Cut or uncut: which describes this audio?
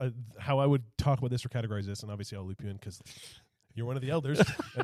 cut